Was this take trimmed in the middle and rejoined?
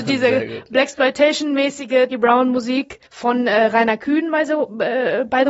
yes; 2 cuts; at 2.1 s, 3.0 s

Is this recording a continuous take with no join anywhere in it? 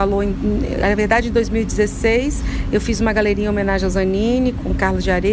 yes; 0 cuts

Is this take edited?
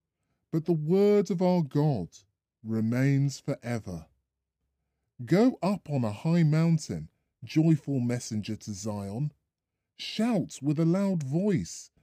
no; 0 cuts

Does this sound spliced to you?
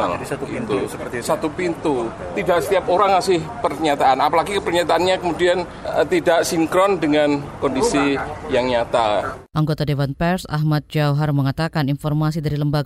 no; 0 cuts

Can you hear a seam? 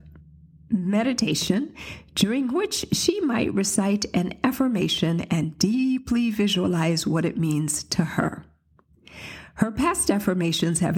no; 0 cuts

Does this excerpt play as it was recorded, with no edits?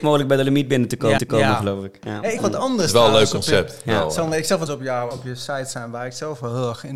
no; 4 cuts; at 1.2 s, 2.4 s, 4.7 s, 5.1 s

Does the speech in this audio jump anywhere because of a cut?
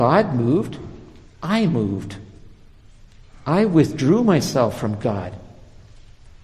no; 0 cuts

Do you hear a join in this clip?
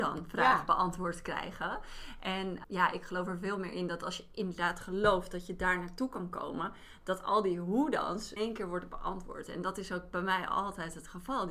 yes; 2 cuts; at 2.6 s, 8.4 s

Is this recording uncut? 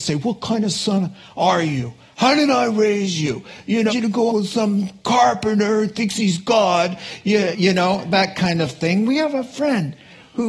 no; 3 cuts; at 3.9 s, 4.3 s, 7.5 s

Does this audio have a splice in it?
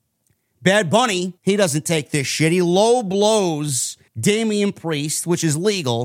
yes; 2 cuts; at 1.4 s, 4.1 s

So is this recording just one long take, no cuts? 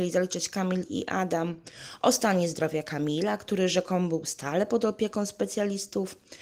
yes; 0 cuts

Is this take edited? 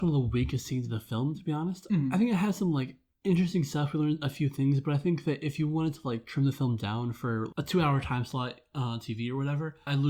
no; 0 cuts

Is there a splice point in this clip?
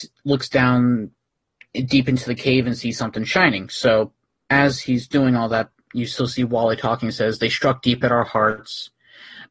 no; 0 cuts

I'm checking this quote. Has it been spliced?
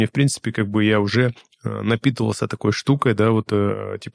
yes; 1 cut; at 1.4 s

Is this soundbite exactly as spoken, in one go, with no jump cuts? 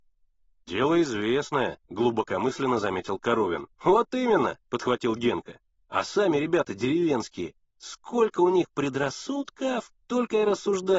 no; 6 cuts; at 1.9 s, 3.7 s, 4.6 s, 5.8 s, 7.7 s, 10.0 s

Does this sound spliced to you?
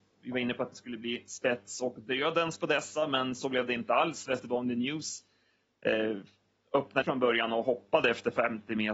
yes; 1 cut; at 7.0 s

